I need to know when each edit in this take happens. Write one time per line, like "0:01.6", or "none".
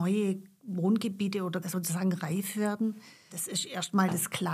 0:01.6